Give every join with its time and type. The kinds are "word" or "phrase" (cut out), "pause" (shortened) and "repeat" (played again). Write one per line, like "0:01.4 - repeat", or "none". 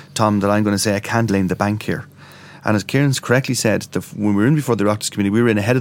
0:01.3 - word